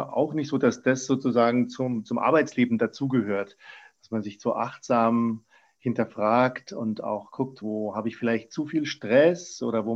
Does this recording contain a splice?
yes; 1 cut; at 7.6 s

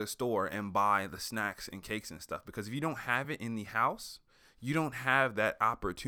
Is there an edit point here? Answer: no; 0 cuts

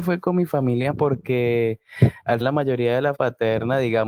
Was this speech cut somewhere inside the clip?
yes; 3 cuts; at 0.9 s, 2.4 s, 3.1 s

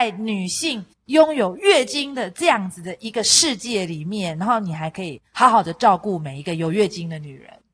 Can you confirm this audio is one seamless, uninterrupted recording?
no; 1 cut; at 0.9 s

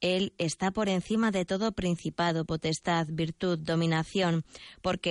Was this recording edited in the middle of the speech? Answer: no; 0 cuts

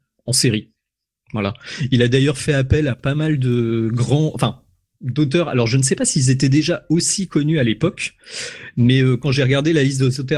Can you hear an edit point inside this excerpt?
no; 0 cuts

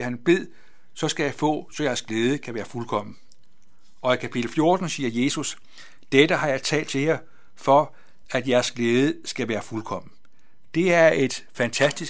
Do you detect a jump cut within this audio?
no; 0 cuts

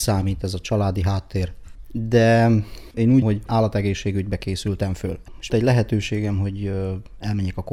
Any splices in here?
yes; 2 cuts; at 3.2 s, 5.5 s

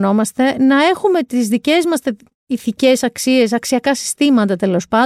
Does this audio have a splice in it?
no; 0 cuts

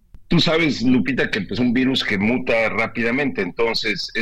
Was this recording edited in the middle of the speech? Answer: yes; 1 cut; at 1.6 s

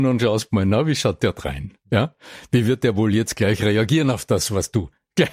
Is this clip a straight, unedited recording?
yes; 0 cuts

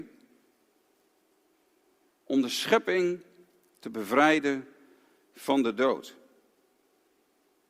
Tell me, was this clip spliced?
no; 0 cuts

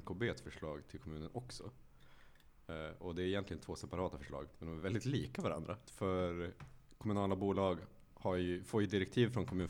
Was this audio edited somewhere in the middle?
no; 0 cuts

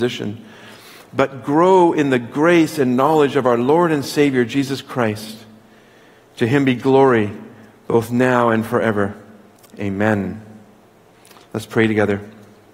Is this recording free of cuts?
yes; 0 cuts

